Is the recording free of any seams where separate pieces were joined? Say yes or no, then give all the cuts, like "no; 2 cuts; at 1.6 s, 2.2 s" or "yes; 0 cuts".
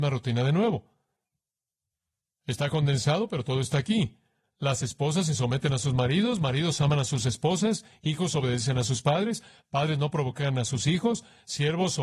yes; 0 cuts